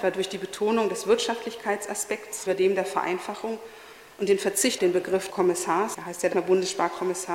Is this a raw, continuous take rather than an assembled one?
no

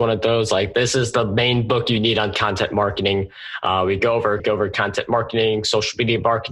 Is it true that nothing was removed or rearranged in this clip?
no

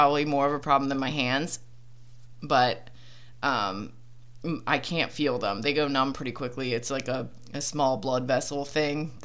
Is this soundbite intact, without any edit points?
yes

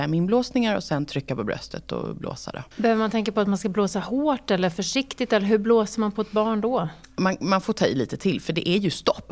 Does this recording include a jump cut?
yes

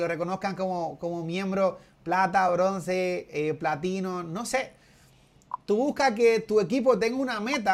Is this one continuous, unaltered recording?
yes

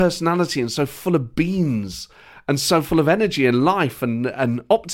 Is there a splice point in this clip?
no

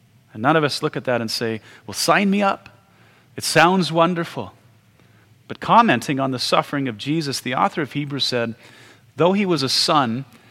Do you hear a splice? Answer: no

